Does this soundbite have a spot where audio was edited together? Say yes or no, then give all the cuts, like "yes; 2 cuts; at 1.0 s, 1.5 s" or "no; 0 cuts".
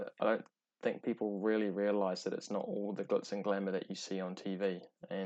no; 0 cuts